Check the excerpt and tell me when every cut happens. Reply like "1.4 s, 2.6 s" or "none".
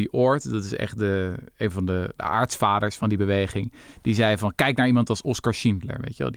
none